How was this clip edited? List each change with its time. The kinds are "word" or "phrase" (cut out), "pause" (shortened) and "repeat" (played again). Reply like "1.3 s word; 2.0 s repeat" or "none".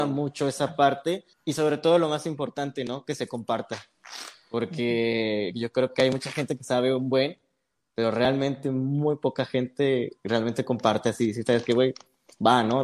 1.3 s pause; 10.2 s pause